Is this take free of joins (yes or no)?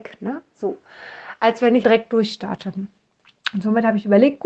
no